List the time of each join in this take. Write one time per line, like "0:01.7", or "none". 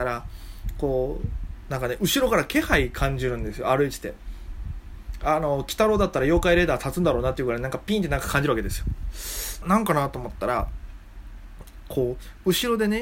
0:09.6